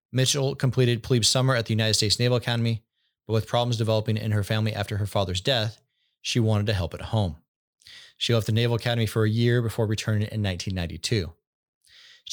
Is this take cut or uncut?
uncut